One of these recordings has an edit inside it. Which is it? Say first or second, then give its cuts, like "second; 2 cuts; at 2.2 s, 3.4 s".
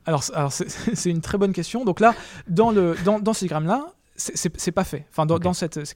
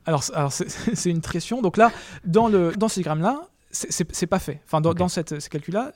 second; 2 cuts; at 1.3 s, 2.7 s